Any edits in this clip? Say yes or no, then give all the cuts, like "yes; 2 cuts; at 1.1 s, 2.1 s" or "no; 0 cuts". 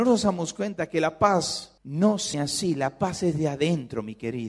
yes; 2 cuts; at 1.8 s, 2.3 s